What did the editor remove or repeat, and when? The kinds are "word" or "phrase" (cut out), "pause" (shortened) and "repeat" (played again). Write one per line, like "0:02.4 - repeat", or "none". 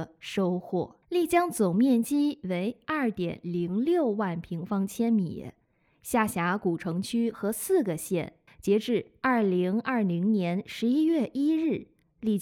0:01.0 - pause
0:08.5 - pause